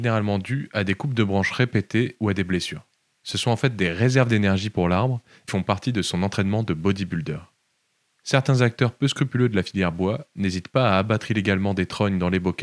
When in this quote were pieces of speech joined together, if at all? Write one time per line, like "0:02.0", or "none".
0:05.5
0:07.7